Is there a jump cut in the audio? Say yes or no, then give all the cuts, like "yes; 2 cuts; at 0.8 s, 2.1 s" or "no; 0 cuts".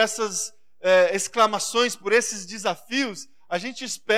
no; 0 cuts